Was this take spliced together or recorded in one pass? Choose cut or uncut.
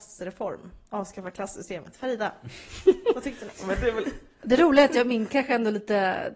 uncut